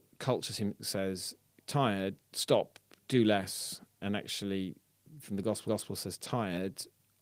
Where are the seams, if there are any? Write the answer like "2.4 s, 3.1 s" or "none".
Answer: 2.2 s, 4.0 s, 5.2 s, 5.7 s